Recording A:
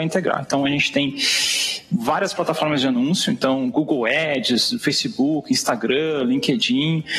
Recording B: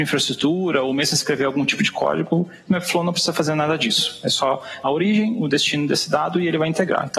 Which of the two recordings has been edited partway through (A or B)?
B